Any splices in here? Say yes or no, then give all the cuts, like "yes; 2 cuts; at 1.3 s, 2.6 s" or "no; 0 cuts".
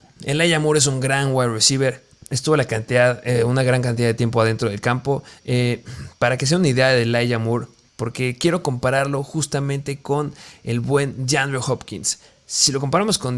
no; 0 cuts